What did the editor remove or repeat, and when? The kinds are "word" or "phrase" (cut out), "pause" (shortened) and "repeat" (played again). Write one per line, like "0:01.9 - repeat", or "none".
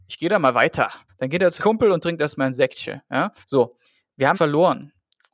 0:01.1 - pause
0:01.6 - word
0:03.4 - pause
0:04.3 - word